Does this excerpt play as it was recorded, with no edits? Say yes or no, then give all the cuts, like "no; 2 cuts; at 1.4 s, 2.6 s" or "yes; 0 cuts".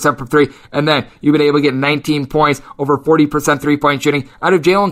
yes; 0 cuts